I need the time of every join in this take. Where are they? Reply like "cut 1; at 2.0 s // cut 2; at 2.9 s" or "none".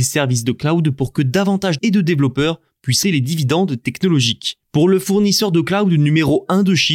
cut 1; at 1.8 s // cut 2; at 3.0 s // cut 3; at 4.7 s